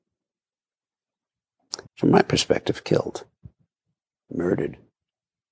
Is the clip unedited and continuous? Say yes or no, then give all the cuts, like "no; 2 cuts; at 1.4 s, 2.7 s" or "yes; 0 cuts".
no; 1 cut; at 1.9 s